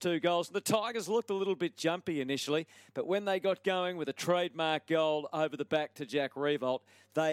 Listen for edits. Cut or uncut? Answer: uncut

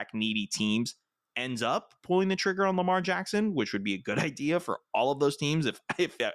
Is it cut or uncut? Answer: uncut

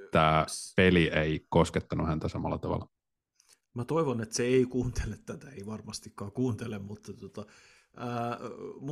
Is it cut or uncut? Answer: uncut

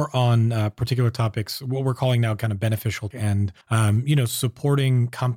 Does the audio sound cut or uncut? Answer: cut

